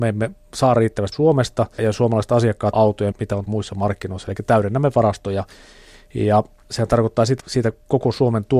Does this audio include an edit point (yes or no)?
yes